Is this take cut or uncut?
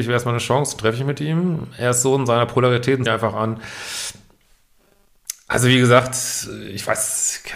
cut